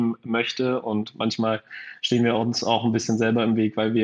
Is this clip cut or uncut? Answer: uncut